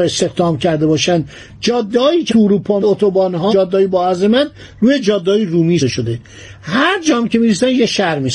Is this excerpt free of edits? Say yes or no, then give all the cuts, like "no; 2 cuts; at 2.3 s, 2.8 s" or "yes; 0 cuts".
no; 4 cuts; at 2.3 s, 2.8 s, 3.5 s, 5.8 s